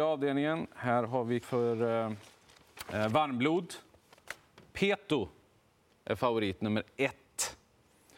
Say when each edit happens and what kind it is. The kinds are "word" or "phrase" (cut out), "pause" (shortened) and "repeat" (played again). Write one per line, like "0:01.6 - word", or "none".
0:01.4 - word